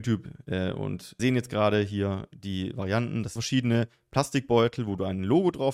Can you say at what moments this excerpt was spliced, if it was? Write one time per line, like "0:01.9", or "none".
0:01.2
0:03.4